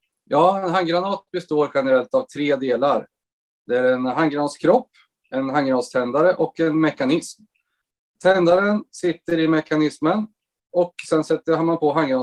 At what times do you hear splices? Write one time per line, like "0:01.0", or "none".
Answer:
none